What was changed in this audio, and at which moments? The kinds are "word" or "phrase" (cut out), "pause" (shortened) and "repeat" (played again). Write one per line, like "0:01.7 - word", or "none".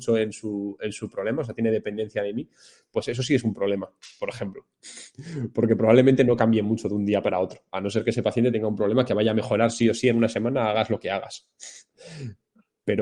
none